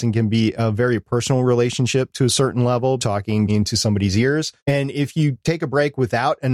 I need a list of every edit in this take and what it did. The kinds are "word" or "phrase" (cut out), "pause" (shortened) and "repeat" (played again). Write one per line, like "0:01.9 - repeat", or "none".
0:03.0 - phrase
0:03.5 - word
0:04.6 - pause